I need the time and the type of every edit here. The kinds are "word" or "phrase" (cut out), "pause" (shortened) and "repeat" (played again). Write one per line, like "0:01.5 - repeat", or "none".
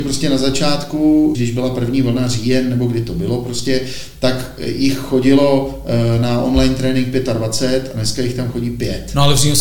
0:01.3 - phrase